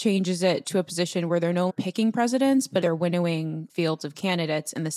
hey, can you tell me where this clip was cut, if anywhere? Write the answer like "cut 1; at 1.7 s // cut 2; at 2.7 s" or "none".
cut 1; at 1.7 s // cut 2; at 2.8 s // cut 3; at 3.7 s

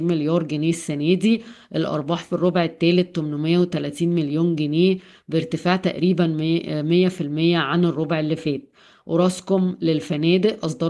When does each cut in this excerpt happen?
none

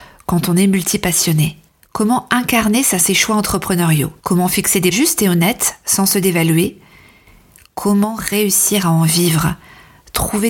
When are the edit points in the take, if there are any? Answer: cut 1; at 1.7 s // cut 2; at 3.0 s // cut 3; at 4.2 s // cut 4; at 4.9 s

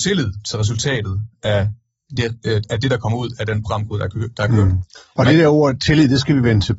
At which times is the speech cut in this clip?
none

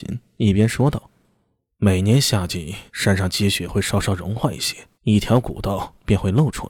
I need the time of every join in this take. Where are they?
cut 1; at 2.9 s // cut 2; at 4.9 s

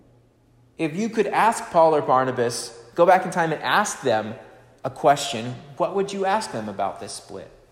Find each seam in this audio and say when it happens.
none

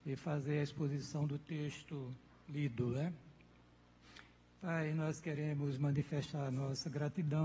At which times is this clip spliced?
cut 1; at 2.3 s

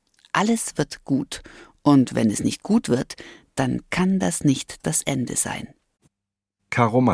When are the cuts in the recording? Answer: none

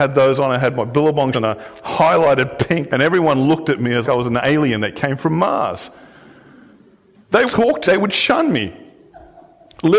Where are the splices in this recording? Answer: cut 1; at 1.3 s // cut 2; at 2.9 s // cut 3; at 4.0 s // cut 4; at 7.5 s // cut 5; at 7.9 s

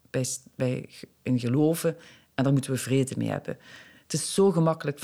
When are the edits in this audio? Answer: none

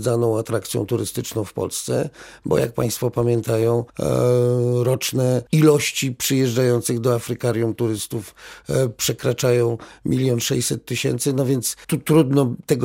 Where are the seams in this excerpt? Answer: cut 1; at 3.9 s // cut 2; at 5.5 s // cut 3; at 11.8 s

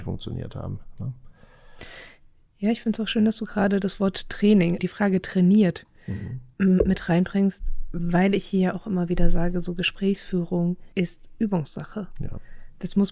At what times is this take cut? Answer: cut 1; at 4.8 s // cut 2; at 10.9 s

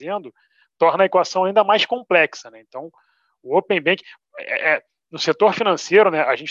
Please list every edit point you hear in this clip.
none

